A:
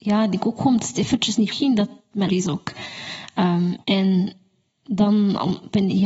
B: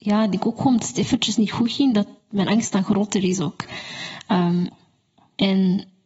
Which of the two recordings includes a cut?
A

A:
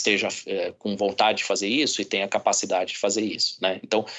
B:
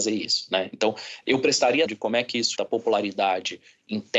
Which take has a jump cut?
B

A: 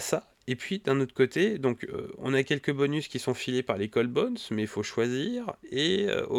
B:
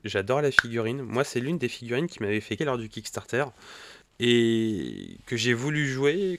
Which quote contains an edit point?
B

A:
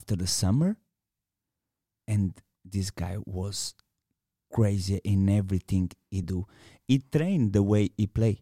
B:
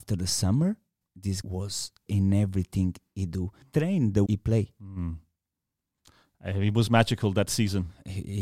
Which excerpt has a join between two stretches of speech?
B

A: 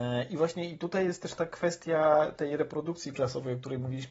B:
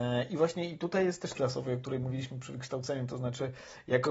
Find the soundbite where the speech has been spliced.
B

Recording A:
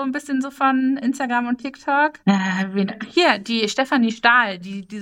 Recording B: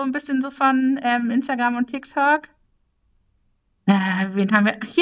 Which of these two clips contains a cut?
A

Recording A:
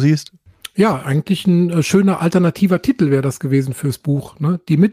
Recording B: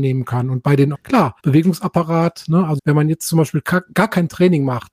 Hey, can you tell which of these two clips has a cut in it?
B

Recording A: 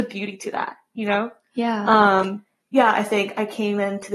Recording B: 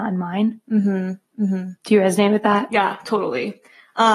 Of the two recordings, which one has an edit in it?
B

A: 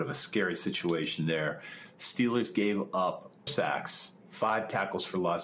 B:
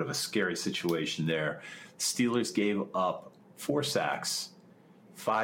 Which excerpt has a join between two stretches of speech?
A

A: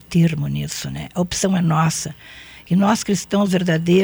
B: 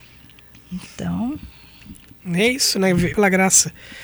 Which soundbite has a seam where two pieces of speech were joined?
B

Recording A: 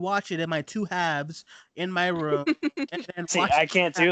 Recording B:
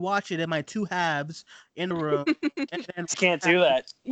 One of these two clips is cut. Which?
B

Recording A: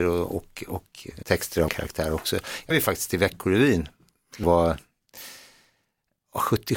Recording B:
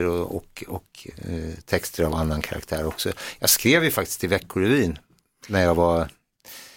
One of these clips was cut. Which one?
A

